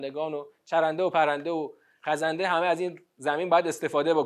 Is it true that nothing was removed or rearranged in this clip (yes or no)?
yes